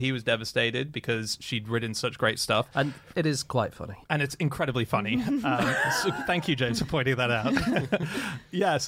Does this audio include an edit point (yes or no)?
yes